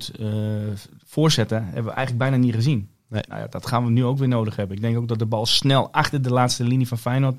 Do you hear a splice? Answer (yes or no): no